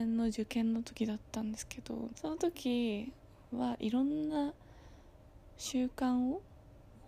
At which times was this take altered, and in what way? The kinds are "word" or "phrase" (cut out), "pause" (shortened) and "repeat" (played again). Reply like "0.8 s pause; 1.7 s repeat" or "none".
2.1 s phrase